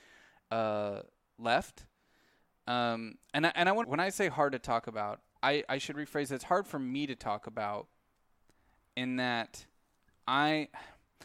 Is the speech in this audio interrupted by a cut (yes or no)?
yes